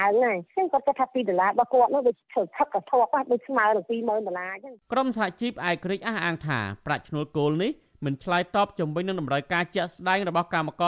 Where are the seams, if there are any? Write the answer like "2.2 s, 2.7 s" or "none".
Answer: none